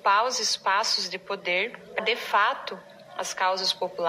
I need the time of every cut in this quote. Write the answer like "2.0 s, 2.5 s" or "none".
2.0 s